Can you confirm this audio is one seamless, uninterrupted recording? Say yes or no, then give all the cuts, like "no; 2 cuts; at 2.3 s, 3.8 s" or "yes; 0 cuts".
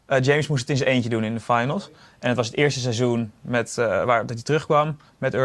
yes; 0 cuts